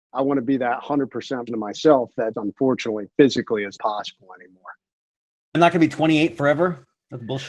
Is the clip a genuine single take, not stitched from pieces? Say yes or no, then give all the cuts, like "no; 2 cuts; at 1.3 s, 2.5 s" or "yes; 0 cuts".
no; 4 cuts; at 1.5 s, 2.3 s, 3.8 s, 5.5 s